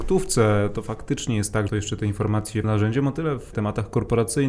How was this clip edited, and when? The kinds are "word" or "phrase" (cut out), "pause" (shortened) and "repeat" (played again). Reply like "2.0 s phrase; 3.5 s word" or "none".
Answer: 1.7 s phrase; 2.6 s phrase; 3.5 s word